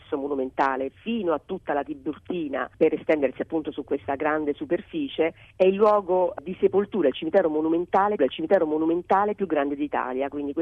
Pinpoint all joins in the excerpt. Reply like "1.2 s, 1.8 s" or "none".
2.7 s, 8.2 s